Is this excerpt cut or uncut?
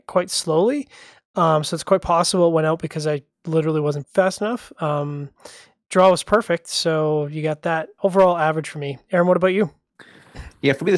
cut